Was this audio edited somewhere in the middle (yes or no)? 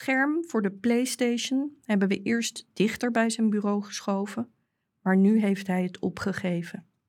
no